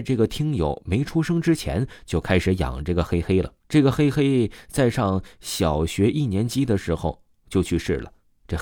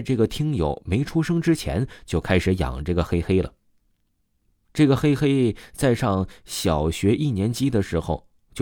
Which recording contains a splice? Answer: first; 1 cut; at 3.6 s

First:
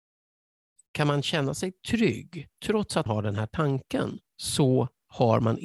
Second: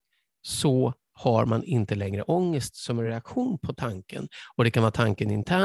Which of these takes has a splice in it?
first; 3 cuts; at 2.5 s, 3.1 s, 4.3 s

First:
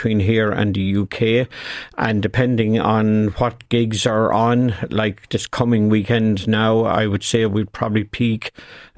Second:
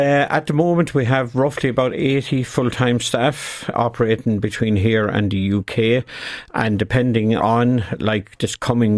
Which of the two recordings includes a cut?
second; 2 cuts; at 3.7 s, 7.4 s

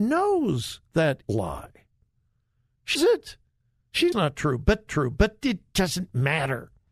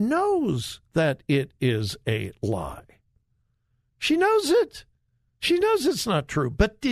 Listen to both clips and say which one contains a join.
first; 4 cuts; at 1.2 s, 3.0 s, 4.1 s, 4.9 s

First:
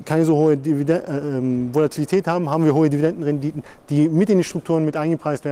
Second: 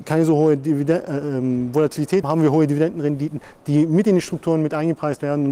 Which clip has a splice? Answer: second; 1 cut; at 2.2 s

